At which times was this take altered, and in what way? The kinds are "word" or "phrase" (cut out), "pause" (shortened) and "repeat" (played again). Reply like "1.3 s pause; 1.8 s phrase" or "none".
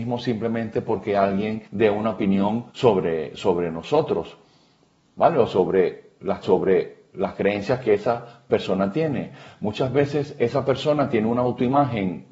1.6 s pause; 2.7 s pause; 6.4 s repeat